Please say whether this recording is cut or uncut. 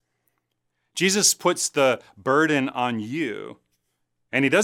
uncut